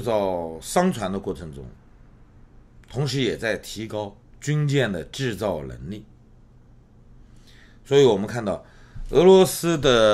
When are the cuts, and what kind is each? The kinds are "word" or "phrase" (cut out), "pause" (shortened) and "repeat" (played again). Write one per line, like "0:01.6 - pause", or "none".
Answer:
0:02.8 - pause
0:04.2 - pause